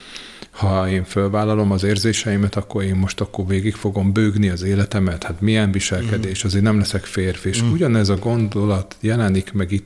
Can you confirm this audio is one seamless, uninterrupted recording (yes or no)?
yes